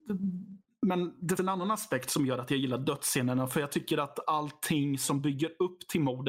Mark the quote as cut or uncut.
cut